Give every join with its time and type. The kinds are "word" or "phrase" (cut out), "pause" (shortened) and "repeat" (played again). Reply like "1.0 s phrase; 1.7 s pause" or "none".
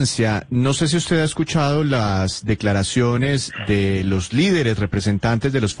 none